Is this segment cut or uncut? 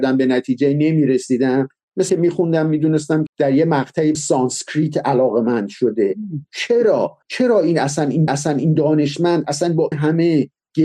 cut